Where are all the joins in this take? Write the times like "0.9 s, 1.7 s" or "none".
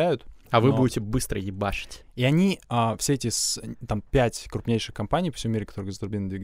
2.6 s